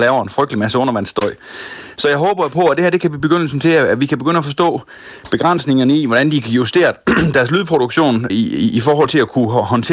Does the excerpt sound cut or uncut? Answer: cut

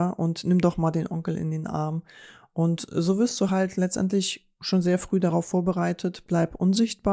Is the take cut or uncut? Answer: uncut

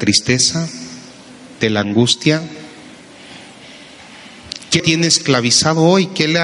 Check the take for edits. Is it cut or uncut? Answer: cut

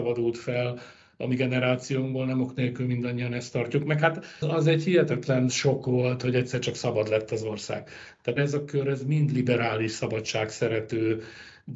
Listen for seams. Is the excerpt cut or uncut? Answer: cut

